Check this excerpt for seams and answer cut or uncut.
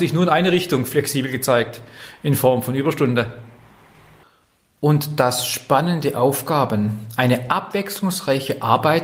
uncut